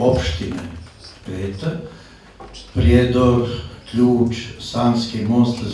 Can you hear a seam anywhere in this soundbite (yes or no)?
no